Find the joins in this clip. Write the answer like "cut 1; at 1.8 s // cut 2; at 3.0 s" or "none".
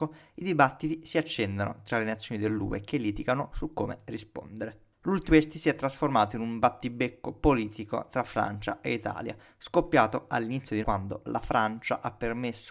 cut 1; at 5.3 s // cut 2; at 10.8 s